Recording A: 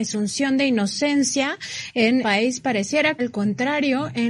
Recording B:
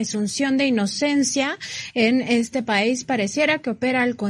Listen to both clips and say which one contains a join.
A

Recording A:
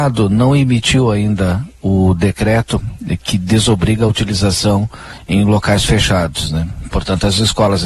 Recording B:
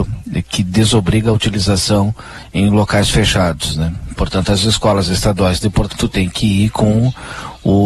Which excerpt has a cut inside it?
B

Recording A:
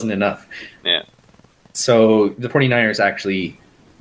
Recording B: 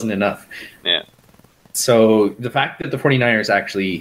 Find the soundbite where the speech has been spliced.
A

